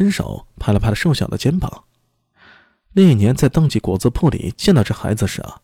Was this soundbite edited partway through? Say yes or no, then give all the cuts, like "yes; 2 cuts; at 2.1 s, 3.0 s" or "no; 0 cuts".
no; 0 cuts